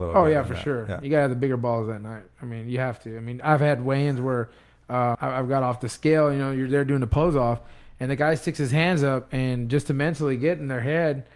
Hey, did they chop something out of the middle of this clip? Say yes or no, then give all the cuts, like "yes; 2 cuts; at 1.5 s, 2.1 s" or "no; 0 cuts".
yes; 1 cut; at 5.1 s